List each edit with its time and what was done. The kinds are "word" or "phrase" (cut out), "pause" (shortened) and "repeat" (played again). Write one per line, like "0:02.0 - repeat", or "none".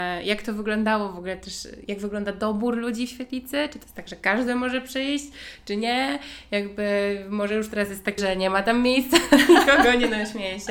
0:01.9 - word
0:08.2 - word